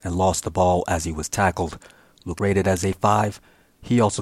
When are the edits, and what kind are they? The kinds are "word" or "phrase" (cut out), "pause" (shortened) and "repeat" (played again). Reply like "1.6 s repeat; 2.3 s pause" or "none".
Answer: 2.4 s word